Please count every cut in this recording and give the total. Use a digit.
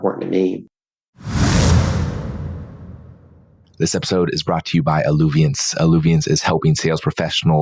0